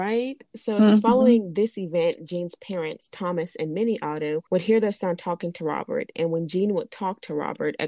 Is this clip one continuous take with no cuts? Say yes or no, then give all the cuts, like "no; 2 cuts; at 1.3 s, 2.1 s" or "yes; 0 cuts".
no; 1 cut; at 4.5 s